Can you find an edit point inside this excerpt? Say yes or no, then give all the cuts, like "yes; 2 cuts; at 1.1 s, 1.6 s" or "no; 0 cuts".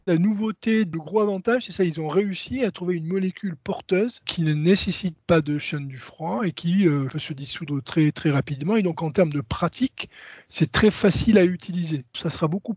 no; 0 cuts